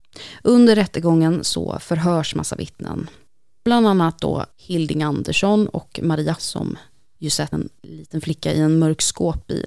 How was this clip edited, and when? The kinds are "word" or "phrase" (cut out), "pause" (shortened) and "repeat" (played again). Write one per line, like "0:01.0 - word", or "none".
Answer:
0:04.5 - pause
0:06.4 - word
0:07.5 - phrase